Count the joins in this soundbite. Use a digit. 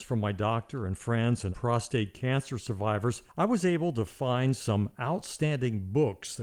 2